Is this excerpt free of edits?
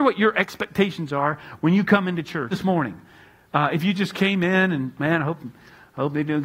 no; 1 cut; at 2.5 s

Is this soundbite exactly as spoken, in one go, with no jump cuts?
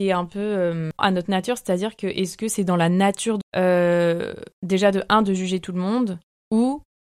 no; 3 cuts; at 1.0 s, 3.4 s, 4.5 s

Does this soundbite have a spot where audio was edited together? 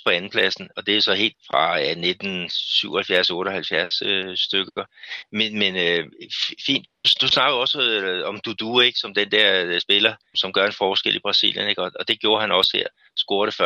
yes; 2 cuts; at 1.3 s, 10.3 s

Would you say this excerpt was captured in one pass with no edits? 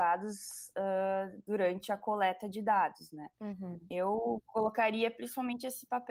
yes; 0 cuts

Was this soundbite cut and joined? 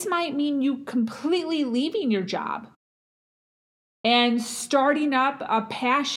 no; 0 cuts

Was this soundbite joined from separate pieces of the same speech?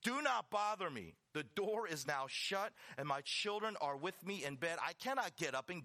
no; 0 cuts

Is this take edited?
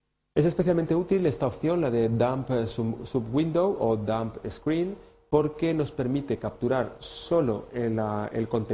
no; 0 cuts

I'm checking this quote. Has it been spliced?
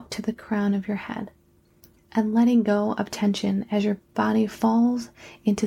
no; 0 cuts

